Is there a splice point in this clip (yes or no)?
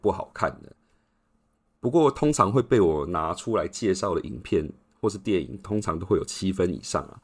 no